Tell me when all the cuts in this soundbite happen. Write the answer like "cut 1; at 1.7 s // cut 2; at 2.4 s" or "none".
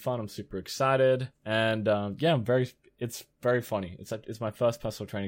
none